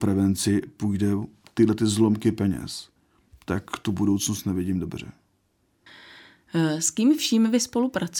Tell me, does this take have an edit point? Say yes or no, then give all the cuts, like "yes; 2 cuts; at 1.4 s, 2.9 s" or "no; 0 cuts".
no; 0 cuts